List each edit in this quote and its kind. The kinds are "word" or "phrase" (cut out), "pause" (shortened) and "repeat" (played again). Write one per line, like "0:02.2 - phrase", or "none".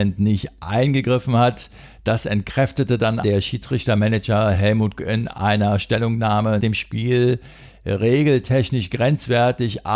0:03.2 - word
0:05.0 - word
0:06.6 - word